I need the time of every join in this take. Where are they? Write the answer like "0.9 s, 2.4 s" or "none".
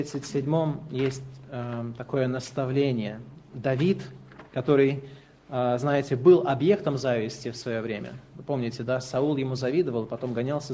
4.5 s